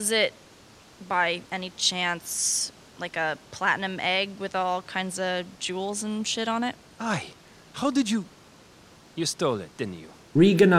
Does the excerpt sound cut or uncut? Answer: uncut